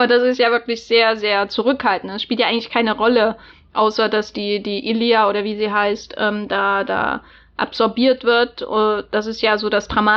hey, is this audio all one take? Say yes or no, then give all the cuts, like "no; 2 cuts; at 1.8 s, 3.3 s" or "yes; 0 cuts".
yes; 0 cuts